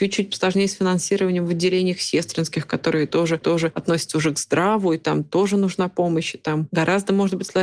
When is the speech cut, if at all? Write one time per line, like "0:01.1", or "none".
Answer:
0:03.4